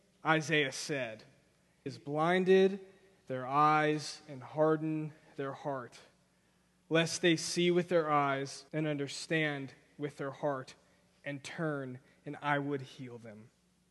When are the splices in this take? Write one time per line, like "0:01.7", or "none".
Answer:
0:01.9
0:08.7